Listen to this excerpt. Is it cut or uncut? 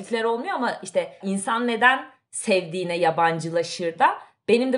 cut